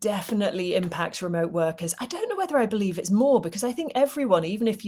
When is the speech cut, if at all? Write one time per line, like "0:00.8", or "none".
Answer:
none